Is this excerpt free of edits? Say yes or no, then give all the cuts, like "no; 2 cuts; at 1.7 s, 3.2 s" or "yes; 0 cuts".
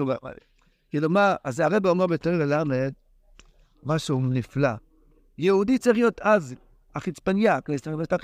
yes; 0 cuts